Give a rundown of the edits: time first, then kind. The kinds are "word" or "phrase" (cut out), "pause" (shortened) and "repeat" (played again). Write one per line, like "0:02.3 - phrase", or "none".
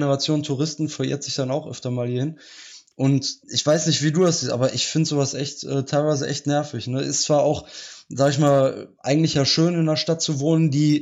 0:03.4 - pause